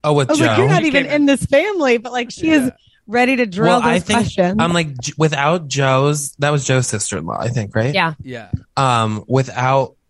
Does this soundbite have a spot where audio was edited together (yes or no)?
no